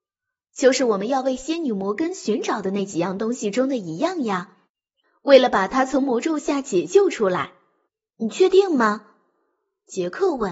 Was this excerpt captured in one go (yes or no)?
no